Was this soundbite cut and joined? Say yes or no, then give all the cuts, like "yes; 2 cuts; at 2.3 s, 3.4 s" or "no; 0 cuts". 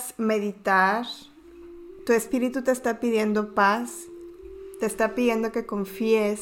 no; 0 cuts